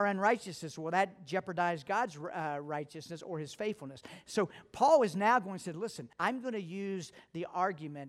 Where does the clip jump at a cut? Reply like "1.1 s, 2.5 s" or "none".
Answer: 6.1 s